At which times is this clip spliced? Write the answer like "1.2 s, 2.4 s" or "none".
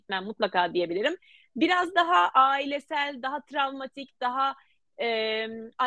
none